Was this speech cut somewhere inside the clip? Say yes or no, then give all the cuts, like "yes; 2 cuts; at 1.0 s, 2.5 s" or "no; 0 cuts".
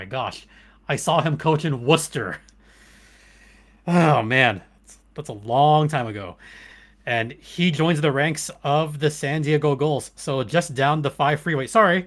no; 0 cuts